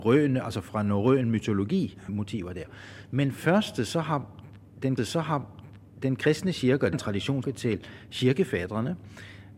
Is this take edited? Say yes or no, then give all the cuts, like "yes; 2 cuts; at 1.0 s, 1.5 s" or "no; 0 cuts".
yes; 5 cuts; at 2.1 s, 3.4 s, 5.0 s, 6.9 s, 7.4 s